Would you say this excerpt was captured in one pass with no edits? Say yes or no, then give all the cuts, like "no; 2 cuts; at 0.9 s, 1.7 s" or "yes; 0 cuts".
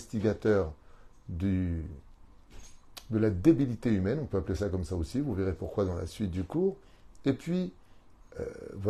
yes; 0 cuts